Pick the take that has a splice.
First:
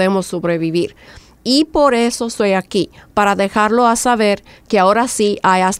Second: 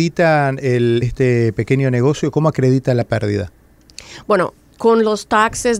second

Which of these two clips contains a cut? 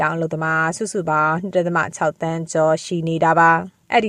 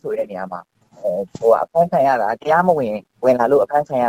second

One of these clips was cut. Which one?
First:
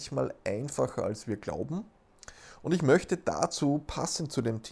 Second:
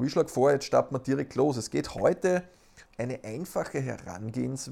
second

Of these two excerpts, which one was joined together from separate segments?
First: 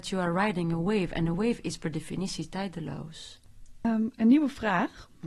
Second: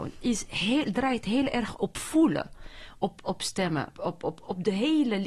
second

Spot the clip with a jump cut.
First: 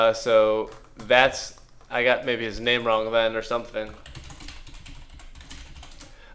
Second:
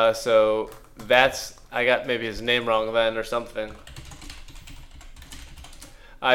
second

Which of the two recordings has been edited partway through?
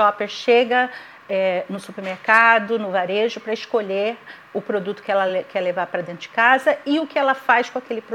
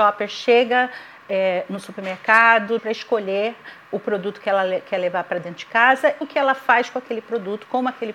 second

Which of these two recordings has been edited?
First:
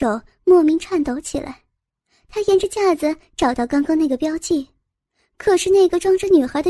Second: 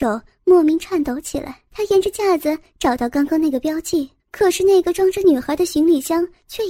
second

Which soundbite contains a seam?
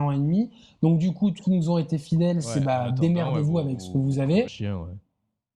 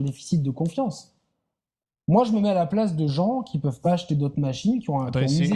first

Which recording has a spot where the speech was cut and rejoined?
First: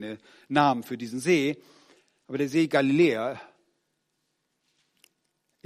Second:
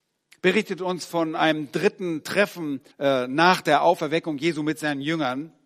second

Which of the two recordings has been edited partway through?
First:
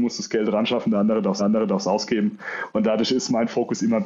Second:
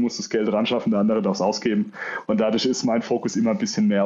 first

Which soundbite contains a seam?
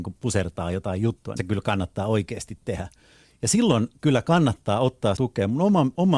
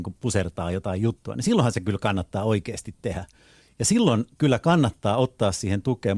first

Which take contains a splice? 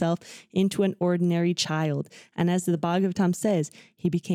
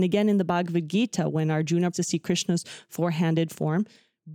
second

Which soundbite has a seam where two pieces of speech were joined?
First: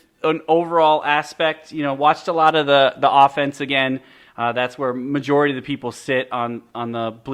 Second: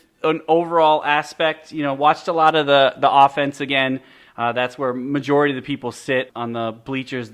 second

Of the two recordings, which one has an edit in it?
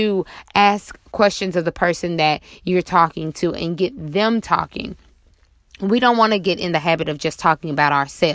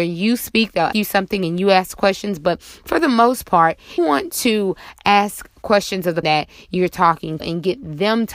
second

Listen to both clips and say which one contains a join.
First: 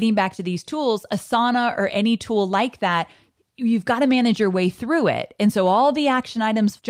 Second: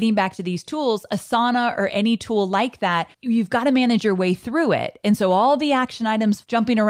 second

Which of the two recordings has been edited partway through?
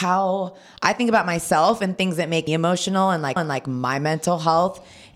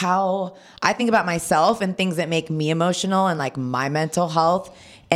first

